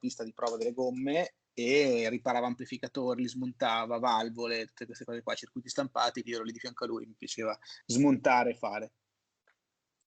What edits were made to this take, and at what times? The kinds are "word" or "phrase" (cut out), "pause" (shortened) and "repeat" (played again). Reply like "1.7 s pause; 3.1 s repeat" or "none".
6.2 s word; 7.8 s pause